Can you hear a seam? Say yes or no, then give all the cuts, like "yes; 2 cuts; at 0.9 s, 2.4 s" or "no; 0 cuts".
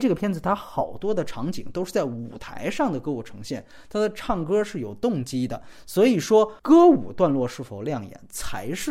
yes; 1 cut; at 6.6 s